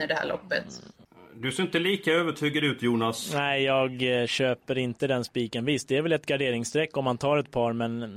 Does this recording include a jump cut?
no; 0 cuts

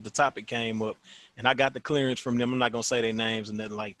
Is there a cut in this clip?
no; 0 cuts

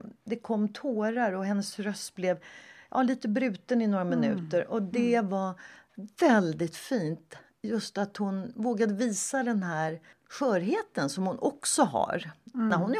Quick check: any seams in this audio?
no; 0 cuts

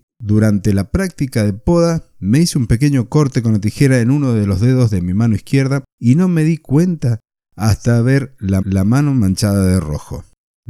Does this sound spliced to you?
yes; 2 cuts; at 5.9 s, 8.6 s

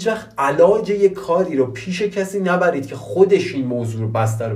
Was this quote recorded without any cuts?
yes; 0 cuts

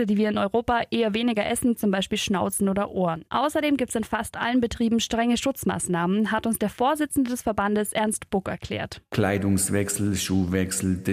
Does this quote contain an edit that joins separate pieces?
yes; 1 cut; at 3.3 s

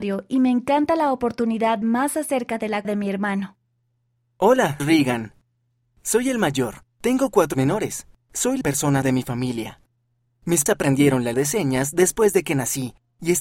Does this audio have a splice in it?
yes; 8 cuts; at 1.8 s, 2.8 s, 4.8 s, 7.5 s, 8.6 s, 9.0 s, 10.7 s, 11.3 s

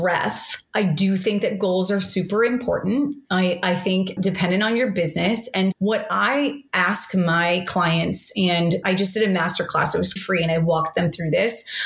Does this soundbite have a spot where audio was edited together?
yes; 4 cuts; at 4.2 s, 5.7 s, 8.8 s, 10.2 s

